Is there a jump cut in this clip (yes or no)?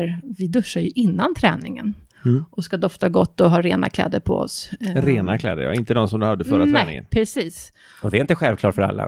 no